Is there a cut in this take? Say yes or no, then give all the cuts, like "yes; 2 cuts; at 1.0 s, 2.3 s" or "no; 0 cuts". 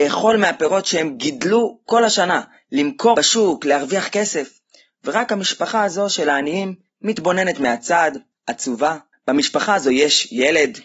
yes; 1 cut; at 3.1 s